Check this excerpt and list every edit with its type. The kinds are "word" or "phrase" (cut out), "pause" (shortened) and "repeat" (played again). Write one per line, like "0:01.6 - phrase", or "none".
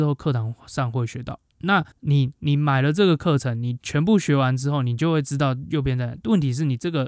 0:01.9 - pause